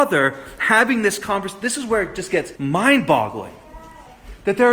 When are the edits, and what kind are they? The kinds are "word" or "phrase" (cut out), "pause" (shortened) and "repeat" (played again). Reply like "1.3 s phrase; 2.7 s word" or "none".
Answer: 2.6 s pause